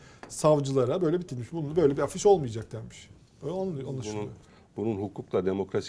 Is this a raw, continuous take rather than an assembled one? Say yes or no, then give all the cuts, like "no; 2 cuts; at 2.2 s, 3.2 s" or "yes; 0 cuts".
no; 1 cut; at 1.3 s